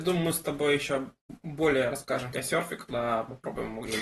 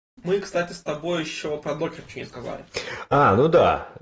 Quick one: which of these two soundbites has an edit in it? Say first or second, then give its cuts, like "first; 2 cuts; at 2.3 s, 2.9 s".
first; 1 cut; at 2.3 s